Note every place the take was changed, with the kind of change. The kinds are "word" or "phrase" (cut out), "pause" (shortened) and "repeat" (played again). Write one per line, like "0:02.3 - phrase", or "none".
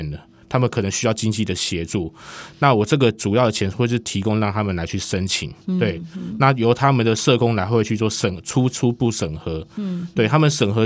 0:05.6 - pause